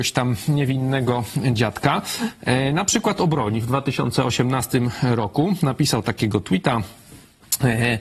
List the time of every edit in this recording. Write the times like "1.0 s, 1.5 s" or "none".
none

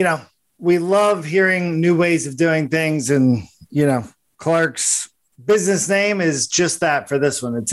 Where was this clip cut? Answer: none

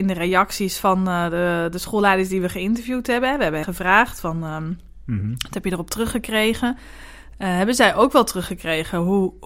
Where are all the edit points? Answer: 3.6 s

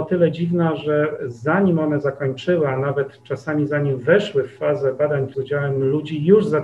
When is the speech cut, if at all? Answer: 5.3 s

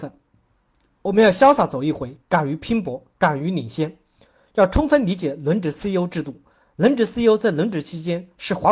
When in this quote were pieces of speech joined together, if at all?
none

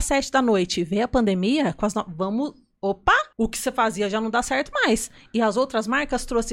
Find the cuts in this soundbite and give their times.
3.3 s

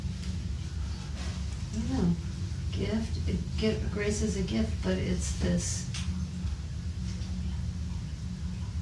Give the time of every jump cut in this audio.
none

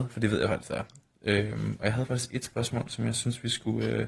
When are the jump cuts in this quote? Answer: none

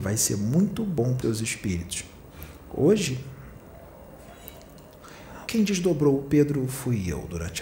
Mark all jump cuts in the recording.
1.2 s, 5.5 s

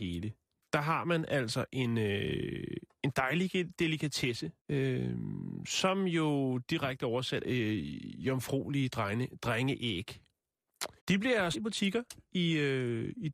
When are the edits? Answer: 4.6 s, 7.4 s, 11.0 s, 11.5 s

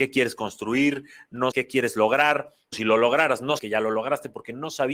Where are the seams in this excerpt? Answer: 1.5 s, 2.7 s, 3.6 s

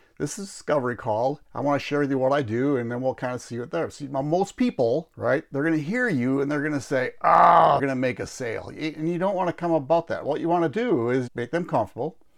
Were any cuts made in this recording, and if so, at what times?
1.4 s, 5.1 s, 7.8 s, 11.3 s

